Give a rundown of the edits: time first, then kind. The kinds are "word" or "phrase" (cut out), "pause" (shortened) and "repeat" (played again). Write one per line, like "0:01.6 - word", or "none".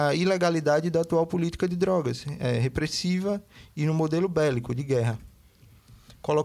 none